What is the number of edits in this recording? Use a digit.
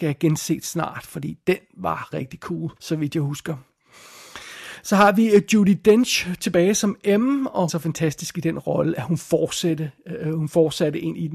3